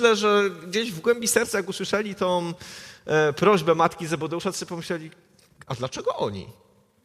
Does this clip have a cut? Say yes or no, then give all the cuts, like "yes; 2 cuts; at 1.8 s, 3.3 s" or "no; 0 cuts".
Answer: no; 0 cuts